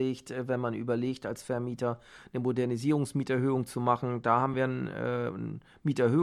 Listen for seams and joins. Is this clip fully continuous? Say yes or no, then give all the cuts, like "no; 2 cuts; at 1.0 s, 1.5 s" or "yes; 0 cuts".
yes; 0 cuts